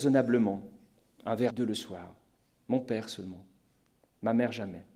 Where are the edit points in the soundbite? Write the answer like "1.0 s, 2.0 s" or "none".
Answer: 1.5 s